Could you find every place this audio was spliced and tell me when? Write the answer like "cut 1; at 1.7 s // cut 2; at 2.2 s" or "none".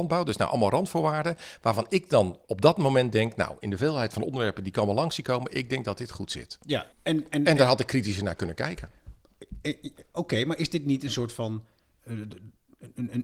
cut 1; at 2.4 s // cut 2; at 6.9 s